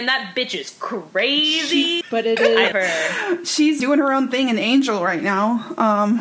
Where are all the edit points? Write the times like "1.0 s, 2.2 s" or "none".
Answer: 2.0 s, 2.7 s, 3.8 s